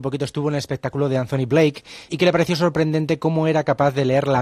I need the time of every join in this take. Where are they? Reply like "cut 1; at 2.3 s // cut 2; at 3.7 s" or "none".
cut 1; at 2.1 s